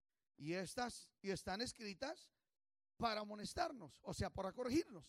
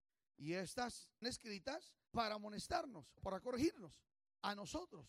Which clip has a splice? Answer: second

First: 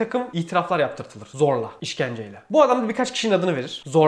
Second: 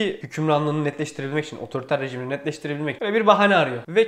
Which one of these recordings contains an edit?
second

